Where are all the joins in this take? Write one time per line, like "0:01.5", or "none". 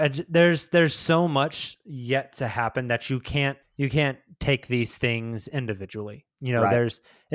0:03.6